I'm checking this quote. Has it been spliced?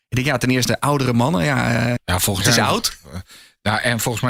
yes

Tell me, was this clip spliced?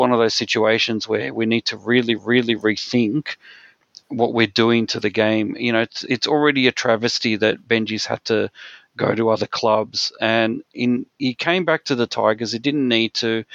yes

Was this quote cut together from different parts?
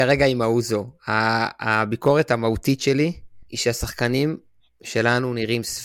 yes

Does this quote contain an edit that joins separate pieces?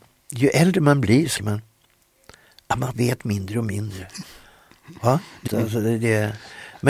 yes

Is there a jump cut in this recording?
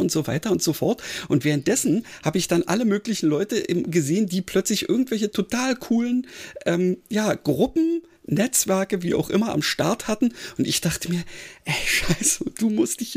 no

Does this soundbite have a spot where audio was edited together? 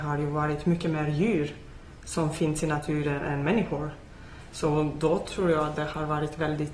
no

